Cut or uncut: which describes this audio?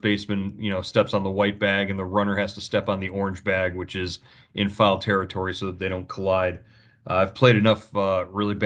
uncut